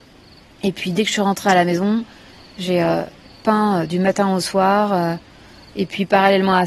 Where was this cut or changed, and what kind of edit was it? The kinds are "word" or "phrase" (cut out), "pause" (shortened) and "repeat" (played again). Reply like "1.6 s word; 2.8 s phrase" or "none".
none